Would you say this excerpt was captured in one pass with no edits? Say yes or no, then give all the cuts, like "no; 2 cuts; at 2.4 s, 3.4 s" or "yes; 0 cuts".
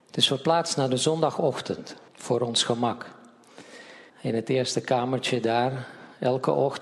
no; 2 cuts; at 2.1 s, 4.1 s